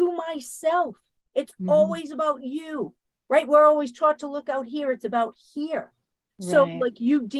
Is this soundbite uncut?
yes; 0 cuts

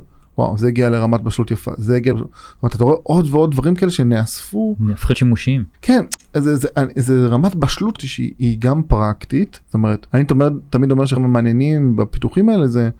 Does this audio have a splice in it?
yes; 8 cuts; at 2.1 s, 5.1 s, 5.7 s, 8.0 s, 8.3 s, 9.6 s, 10.1 s, 11.2 s

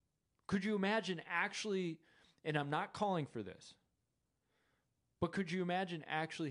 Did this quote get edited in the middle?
no; 0 cuts

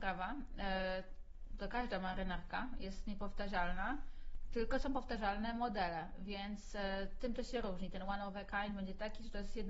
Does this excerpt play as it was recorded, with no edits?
yes; 0 cuts

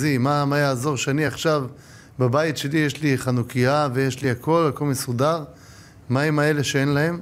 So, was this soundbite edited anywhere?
no; 0 cuts

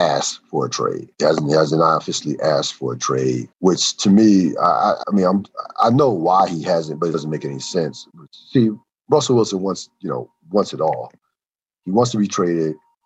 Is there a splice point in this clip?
yes; 5 cuts; at 1.1 s, 3.5 s, 5.0 s, 7.1 s, 8.8 s

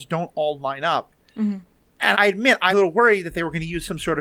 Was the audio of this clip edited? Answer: yes; 2 cuts; at 2.1 s, 2.7 s

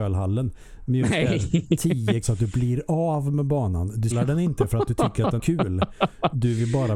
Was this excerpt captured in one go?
no; 3 cuts; at 2.2 s, 4.1 s, 5.4 s

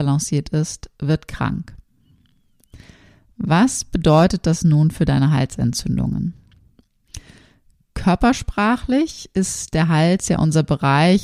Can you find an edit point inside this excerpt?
no; 0 cuts

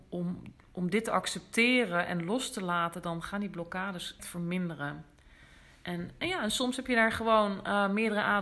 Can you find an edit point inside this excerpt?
yes; 1 cut; at 4.2 s

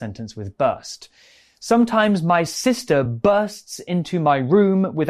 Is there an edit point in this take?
no; 0 cuts

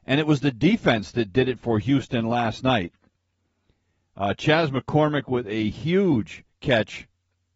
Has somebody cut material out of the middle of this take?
no; 0 cuts

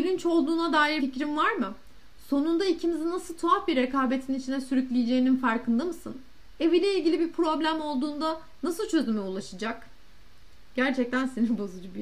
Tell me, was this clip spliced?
yes; 1 cut; at 1.0 s

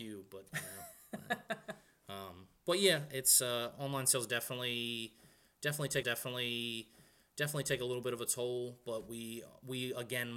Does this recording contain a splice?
yes; 1 cut; at 6.0 s

